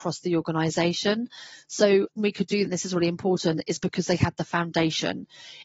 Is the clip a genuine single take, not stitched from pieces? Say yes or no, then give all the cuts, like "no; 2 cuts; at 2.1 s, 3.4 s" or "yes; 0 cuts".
no; 2 cuts; at 2.2 s, 2.6 s